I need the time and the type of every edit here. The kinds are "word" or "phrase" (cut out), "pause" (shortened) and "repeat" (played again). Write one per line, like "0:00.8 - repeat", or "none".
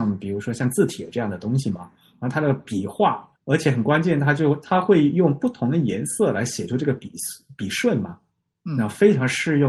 0:03.4 - pause

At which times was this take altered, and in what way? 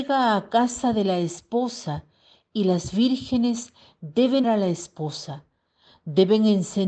0:04.4 - word

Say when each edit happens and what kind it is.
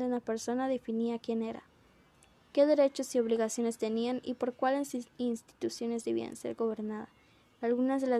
0:05.1 - pause

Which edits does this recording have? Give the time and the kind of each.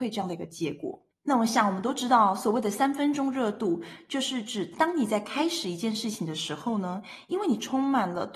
0:01.1 - pause

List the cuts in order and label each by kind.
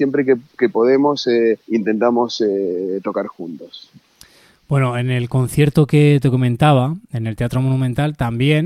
0:01.6 - pause

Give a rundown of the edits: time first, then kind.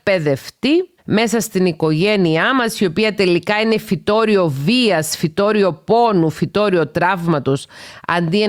0:01.0 - pause

